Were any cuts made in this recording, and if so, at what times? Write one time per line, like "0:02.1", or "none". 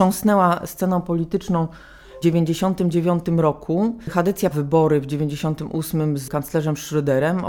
0:02.2
0:04.5